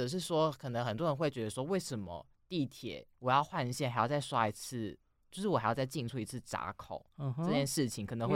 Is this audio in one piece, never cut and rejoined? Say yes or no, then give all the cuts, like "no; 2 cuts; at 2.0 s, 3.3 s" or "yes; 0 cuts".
no; 1 cut; at 3.1 s